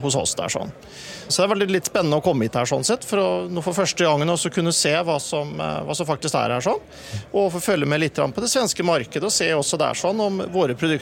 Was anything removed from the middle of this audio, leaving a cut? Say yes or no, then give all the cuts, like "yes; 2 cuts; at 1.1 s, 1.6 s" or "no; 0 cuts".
yes; 1 cut; at 1.3 s